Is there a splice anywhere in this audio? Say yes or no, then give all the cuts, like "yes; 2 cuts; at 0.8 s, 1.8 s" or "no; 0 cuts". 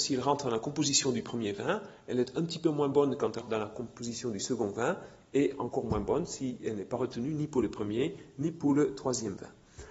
yes; 1 cut; at 3.4 s